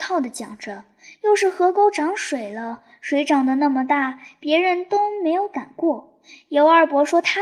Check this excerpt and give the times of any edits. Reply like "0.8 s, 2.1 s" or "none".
none